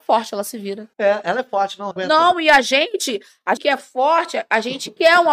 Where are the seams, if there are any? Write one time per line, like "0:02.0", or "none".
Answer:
0:00.9
0:01.9
0:03.6